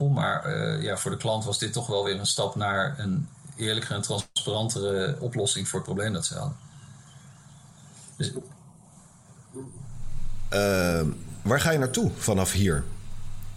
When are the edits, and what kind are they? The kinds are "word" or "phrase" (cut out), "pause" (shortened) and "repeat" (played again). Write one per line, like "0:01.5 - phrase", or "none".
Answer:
none